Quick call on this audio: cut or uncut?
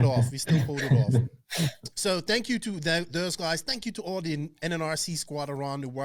cut